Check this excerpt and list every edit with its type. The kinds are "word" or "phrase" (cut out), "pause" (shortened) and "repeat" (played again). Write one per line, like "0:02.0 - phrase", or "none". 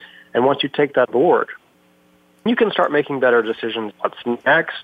0:01.0 - word
0:02.5 - word
0:03.9 - word

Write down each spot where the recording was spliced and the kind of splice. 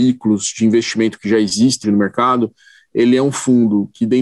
0:01.8 - word

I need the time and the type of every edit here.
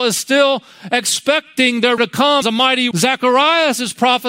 0:02.0 - word
0:02.4 - word
0:02.9 - word

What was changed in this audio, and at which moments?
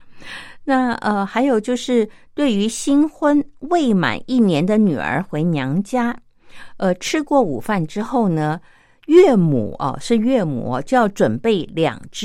none

